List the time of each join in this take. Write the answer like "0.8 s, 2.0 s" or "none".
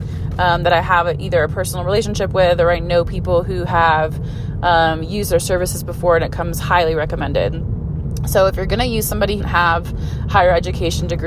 9.4 s